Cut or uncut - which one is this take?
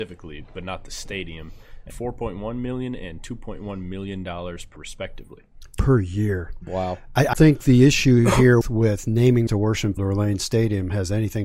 cut